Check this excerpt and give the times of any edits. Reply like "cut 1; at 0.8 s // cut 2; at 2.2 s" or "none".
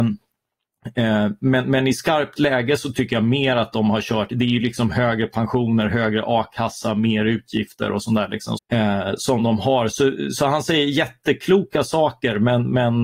cut 1; at 8.6 s